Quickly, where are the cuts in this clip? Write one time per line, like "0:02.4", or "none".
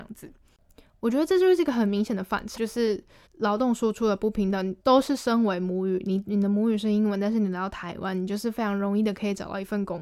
0:02.6
0:03.3
0:04.8